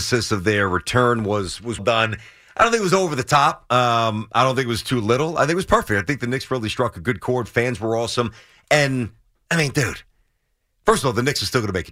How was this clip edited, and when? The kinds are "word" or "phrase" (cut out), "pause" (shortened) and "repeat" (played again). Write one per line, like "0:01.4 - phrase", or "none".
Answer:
0:01.8 - word

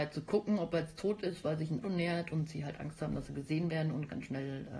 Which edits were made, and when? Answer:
0:01.8 - word

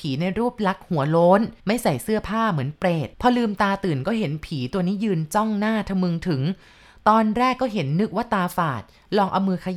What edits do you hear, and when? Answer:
0:01.6 - pause
0:03.1 - pause

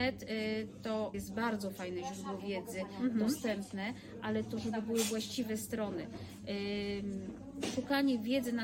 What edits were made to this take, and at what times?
0:01.1 - word

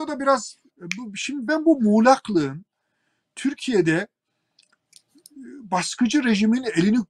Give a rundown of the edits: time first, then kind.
none

